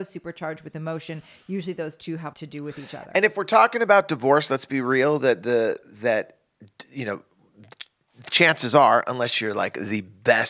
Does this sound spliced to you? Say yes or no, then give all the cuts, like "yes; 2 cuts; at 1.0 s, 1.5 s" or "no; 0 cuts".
yes; 1 cut; at 2.3 s